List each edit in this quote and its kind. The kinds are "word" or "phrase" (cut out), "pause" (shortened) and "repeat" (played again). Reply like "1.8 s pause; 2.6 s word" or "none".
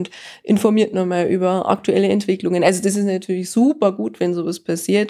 none